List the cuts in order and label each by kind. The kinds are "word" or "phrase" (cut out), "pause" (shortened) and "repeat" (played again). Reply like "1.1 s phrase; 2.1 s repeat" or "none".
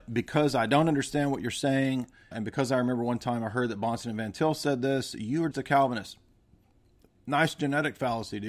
2.3 s word; 5.5 s word